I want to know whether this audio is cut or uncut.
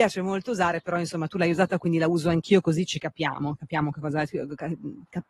uncut